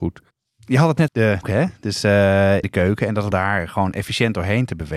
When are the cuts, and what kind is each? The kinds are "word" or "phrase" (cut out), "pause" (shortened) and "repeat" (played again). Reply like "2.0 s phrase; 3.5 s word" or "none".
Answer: 1.1 s word; 1.4 s word; 2.6 s word; 3.3 s phrase

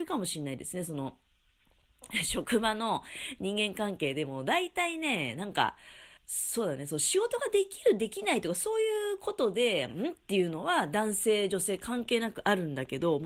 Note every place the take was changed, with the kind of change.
6.2 s pause

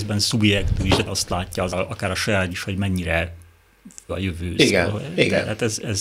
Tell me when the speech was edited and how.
1.1 s word; 1.7 s word; 2.5 s word; 4.1 s word

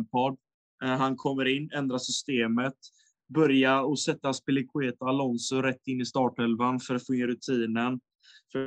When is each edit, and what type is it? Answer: none

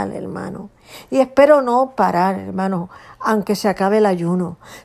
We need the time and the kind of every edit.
none

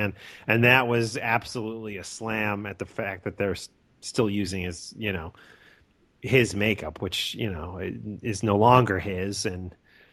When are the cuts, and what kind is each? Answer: none

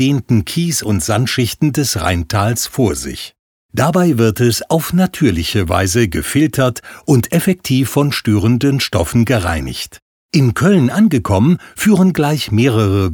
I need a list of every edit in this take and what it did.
none

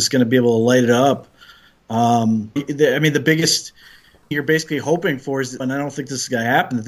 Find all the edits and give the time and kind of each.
2.6 s word; 4.3 s word; 5.6 s word

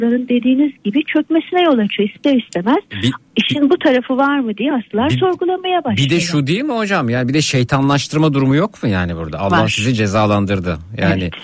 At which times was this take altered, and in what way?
none

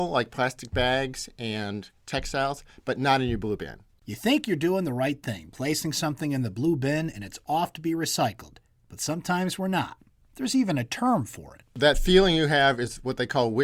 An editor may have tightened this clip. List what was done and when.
none

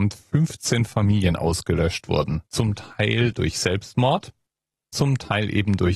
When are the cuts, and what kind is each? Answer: 2.5 s pause; 4.9 s word

